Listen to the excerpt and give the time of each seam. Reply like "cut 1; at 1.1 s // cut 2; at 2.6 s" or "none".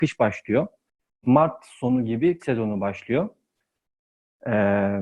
cut 1; at 2.4 s